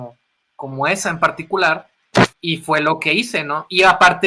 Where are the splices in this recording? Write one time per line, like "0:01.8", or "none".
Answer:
0:02.3